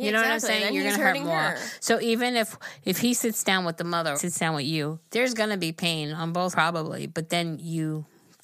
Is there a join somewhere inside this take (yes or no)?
yes